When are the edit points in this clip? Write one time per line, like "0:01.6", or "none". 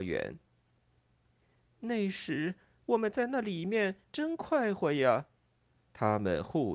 none